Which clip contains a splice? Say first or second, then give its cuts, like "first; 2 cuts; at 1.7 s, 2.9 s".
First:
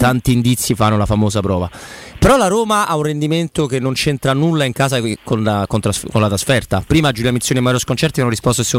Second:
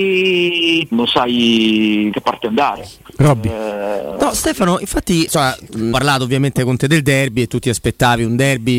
second; 4 cuts; at 0.9 s, 2.1 s, 5.3 s, 5.9 s